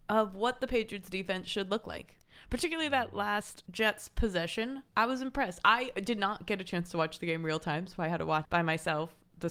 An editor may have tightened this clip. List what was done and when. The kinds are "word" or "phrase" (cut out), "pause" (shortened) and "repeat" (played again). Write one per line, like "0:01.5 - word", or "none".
0:04.9 - pause
0:08.4 - word

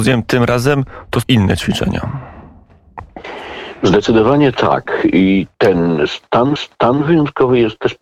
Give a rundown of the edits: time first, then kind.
0:01.2 - word
0:05.5 - pause
0:06.6 - repeat

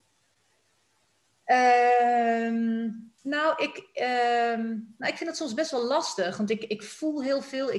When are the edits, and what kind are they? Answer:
0:03.2 - pause

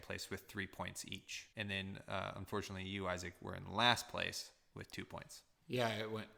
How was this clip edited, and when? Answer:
0:01.5 - pause

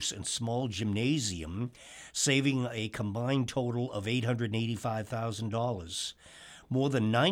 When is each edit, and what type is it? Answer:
none

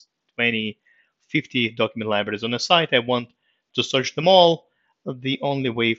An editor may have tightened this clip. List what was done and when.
none

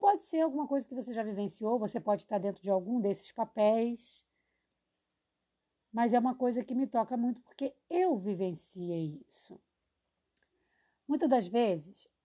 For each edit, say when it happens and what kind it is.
none

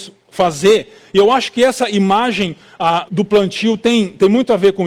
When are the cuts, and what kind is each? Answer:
0:03.1 - word

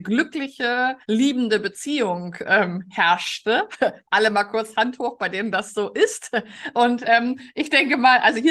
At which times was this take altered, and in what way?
0:01.0 - pause

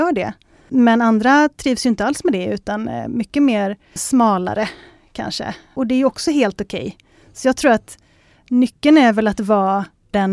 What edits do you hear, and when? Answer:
none

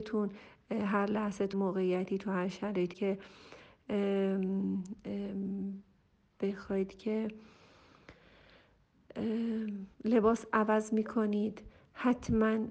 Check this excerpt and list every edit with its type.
0:01.5 - word
0:02.9 - word
0:09.9 - pause

